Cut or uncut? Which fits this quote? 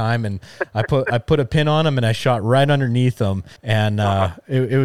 cut